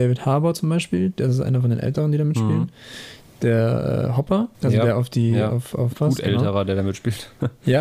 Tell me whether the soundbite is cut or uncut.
cut